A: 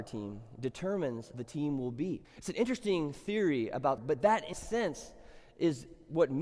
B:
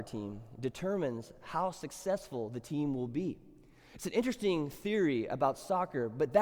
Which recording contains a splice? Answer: A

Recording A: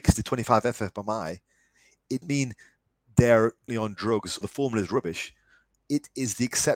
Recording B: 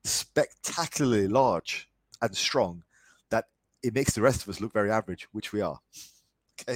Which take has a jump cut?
A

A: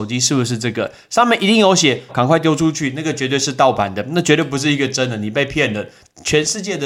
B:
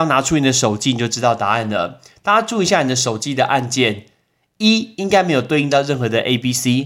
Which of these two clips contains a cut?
A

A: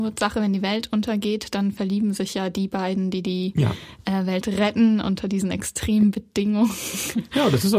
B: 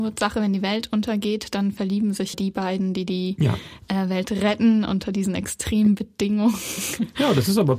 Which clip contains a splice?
B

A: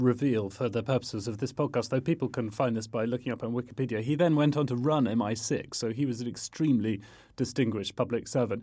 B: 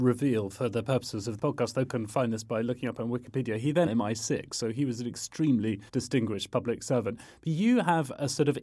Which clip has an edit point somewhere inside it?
B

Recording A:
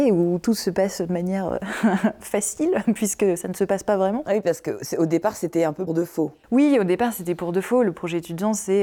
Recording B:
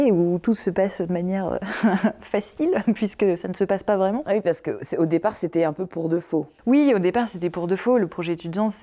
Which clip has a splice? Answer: A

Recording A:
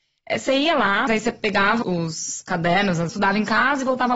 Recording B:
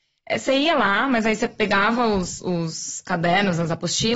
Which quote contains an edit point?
A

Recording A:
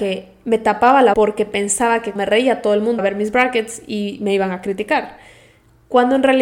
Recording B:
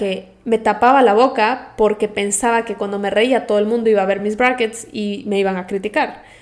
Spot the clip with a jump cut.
A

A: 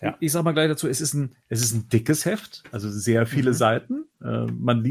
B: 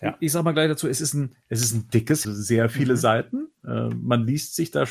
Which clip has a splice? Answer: B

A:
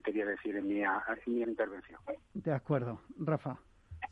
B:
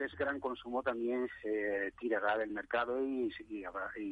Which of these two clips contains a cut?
A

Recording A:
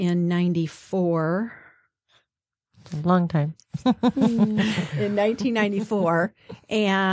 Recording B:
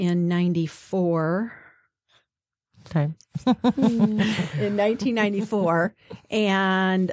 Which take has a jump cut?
B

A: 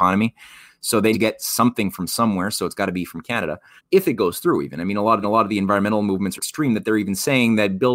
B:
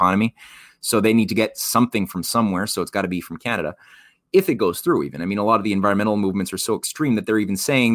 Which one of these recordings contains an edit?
A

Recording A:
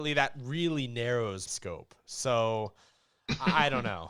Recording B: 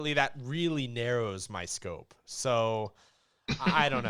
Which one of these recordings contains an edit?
A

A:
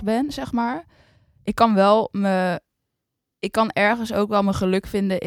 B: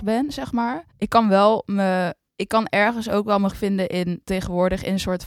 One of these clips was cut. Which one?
B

